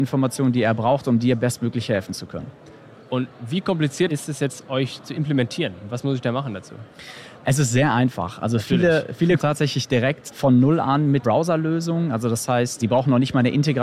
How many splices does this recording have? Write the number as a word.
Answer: three